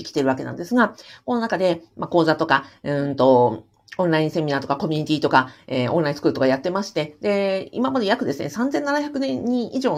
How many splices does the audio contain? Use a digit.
0